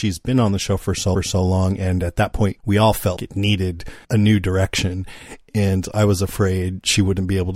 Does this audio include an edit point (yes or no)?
yes